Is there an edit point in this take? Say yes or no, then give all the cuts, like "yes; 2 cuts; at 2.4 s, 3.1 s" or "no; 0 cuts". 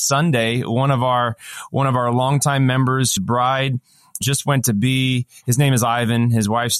yes; 2 cuts; at 3.2 s, 4.2 s